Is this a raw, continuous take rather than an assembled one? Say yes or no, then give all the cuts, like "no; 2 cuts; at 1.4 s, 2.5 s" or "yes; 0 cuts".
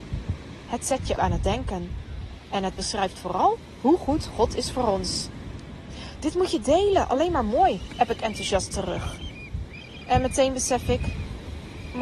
no; 1 cut; at 1.2 s